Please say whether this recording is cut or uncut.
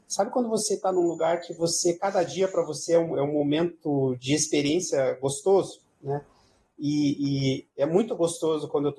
uncut